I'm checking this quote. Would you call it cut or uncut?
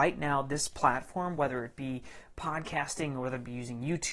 uncut